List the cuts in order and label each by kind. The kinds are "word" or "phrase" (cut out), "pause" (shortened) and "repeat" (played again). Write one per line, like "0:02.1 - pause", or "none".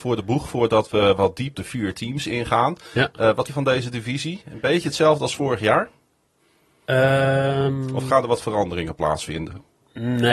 0:01.5 - word
0:03.5 - word